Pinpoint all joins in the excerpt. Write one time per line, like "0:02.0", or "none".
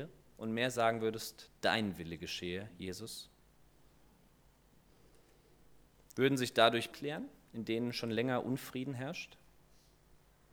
0:06.9